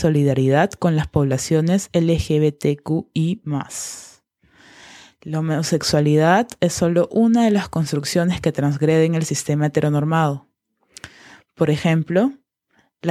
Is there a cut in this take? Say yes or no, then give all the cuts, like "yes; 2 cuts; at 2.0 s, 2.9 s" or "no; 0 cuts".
no; 0 cuts